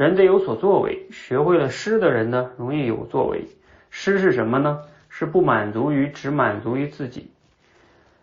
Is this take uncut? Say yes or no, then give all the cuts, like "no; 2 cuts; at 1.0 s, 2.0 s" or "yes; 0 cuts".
yes; 0 cuts